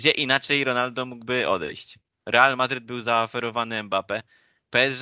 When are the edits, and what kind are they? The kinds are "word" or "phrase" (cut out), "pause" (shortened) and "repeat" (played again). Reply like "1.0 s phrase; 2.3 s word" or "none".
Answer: none